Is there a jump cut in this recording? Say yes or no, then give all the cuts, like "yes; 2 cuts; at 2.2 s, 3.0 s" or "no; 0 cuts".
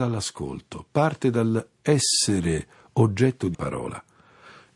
yes; 1 cut; at 3.5 s